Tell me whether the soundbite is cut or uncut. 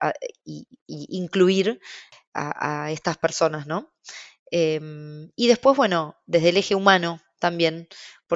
uncut